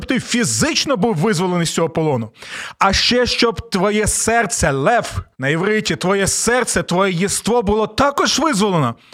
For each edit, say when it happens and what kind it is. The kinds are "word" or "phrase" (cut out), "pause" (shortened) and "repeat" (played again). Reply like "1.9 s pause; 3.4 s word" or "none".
5.3 s pause